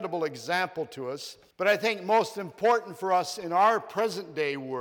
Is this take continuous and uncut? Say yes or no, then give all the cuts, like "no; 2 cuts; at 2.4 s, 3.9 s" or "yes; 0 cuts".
no; 1 cut; at 1.5 s